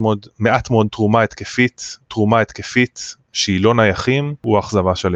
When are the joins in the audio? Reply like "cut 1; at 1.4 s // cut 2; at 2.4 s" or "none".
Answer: cut 1; at 2.1 s

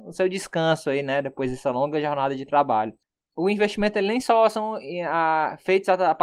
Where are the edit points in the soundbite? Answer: none

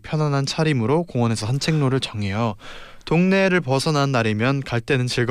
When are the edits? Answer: cut 1; at 1.4 s

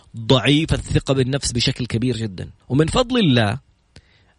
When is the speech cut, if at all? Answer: cut 1; at 2.6 s

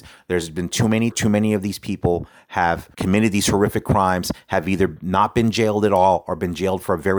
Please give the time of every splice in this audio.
cut 1; at 1.1 s // cut 2; at 2.9 s

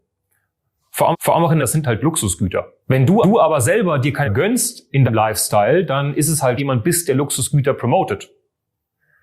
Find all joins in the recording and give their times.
cut 1; at 1.1 s // cut 2; at 1.6 s // cut 3; at 2.8 s // cut 4; at 3.2 s // cut 5; at 4.2 s // cut 6; at 5.1 s // cut 7; at 6.6 s

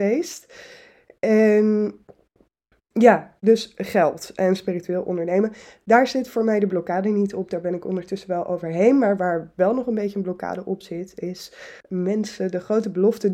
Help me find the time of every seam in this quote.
cut 1; at 11.8 s

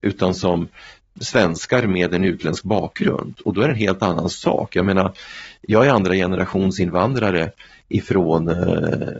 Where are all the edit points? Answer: none

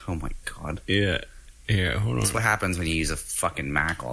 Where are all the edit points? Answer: none

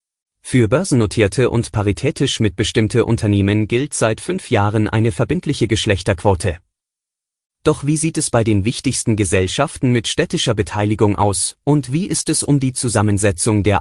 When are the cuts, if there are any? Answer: none

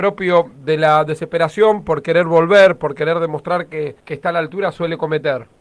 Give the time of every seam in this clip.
cut 1; at 4.0 s

